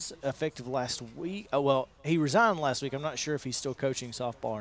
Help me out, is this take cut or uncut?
cut